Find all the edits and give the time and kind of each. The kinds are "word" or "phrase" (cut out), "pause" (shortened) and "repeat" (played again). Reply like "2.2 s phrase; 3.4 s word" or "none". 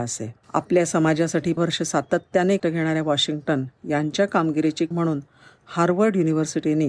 1.6 s word; 2.6 s word; 3.8 s pause; 4.9 s word